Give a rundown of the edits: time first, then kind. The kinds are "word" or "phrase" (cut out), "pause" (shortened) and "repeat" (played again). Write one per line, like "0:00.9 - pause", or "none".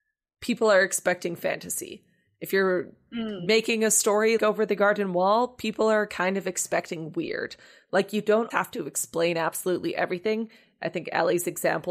0:04.4 - word
0:08.5 - word